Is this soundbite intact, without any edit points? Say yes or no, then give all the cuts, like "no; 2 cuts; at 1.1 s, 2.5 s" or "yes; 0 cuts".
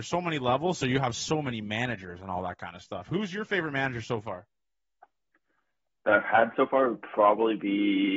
yes; 0 cuts